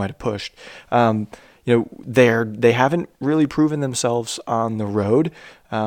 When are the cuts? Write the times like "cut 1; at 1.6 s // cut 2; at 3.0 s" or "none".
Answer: none